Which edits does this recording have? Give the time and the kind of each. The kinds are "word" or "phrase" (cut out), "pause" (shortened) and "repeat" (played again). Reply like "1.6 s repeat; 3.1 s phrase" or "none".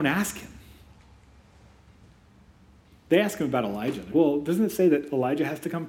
4.1 s word